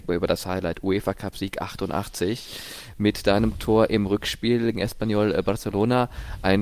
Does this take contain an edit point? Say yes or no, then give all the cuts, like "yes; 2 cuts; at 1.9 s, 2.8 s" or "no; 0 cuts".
yes; 1 cut; at 4.7 s